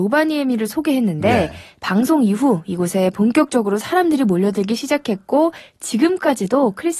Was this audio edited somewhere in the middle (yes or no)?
no